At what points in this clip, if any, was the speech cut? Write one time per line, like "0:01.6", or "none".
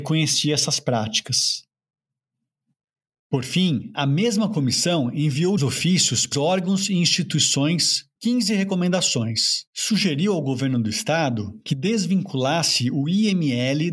0:05.6
0:06.3
0:08.2
0:09.7